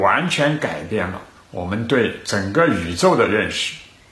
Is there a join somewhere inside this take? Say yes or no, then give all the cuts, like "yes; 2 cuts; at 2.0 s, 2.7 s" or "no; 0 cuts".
no; 0 cuts